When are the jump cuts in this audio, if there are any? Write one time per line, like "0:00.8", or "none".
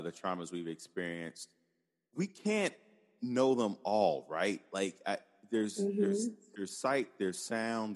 none